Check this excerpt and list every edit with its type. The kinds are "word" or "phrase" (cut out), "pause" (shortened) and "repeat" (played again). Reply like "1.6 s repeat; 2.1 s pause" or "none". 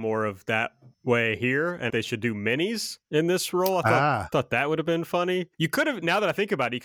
0.9 s pause; 1.9 s phrase; 3.0 s pause; 5.5 s pause